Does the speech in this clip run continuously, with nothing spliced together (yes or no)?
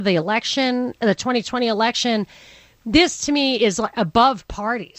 yes